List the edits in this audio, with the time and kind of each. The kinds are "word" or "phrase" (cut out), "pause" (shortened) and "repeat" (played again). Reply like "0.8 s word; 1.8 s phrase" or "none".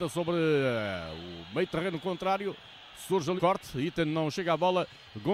3.4 s word

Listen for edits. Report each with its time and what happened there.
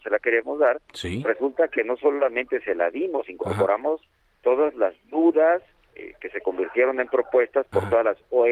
none

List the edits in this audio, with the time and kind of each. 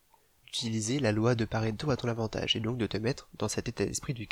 none

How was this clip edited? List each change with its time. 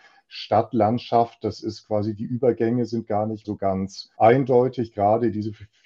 3.4 s word; 4.1 s pause

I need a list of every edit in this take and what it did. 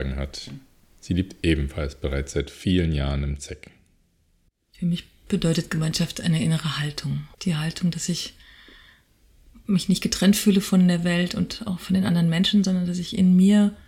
7.3 s pause

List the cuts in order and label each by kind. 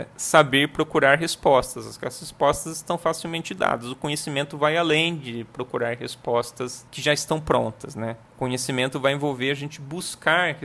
6.9 s pause; 8.3 s pause

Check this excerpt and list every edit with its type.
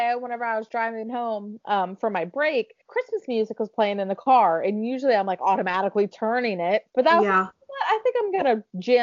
2.8 s pause; 6.9 s pause

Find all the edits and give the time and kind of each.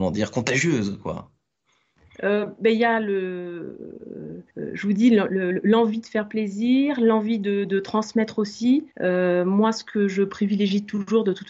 4.5 s pause; 8.9 s pause

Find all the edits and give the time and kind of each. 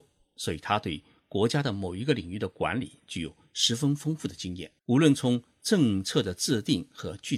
4.8 s pause

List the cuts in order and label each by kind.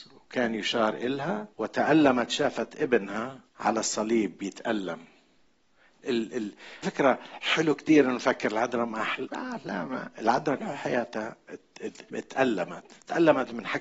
1.5 s pause; 3.5 s pause; 6.0 s word; 6.8 s word; 9.2 s word; 10.6 s word; 12.1 s pause

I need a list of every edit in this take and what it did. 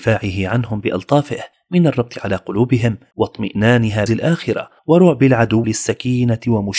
4.1 s word; 5.6 s word

